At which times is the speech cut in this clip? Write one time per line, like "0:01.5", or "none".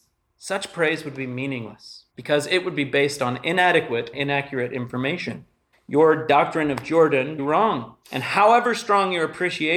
0:02.1
0:04.1
0:05.7
0:07.4
0:08.0